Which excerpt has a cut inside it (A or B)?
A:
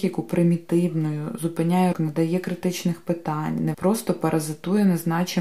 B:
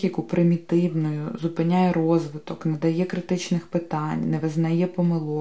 A